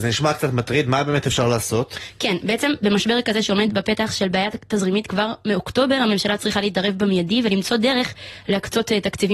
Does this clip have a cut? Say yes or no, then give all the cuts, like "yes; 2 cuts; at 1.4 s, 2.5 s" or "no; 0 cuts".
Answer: no; 0 cuts